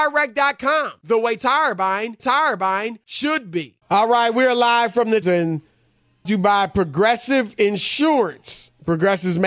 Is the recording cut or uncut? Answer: cut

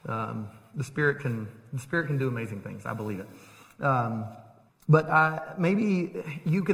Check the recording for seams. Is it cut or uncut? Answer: cut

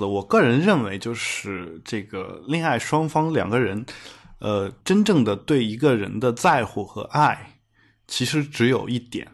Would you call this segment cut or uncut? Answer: cut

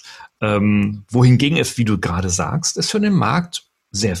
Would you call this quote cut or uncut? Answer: uncut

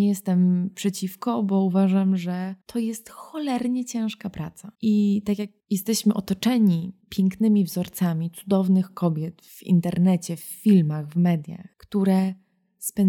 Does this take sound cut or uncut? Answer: cut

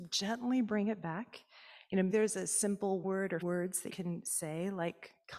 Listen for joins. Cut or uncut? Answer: cut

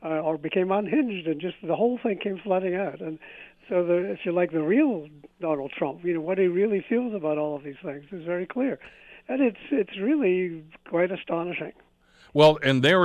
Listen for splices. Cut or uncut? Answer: uncut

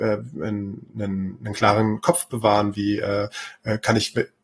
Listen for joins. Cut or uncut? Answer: uncut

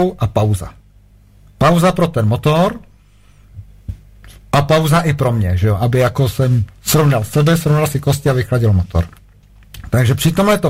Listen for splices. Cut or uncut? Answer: uncut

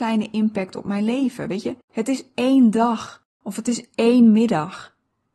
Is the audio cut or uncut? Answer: cut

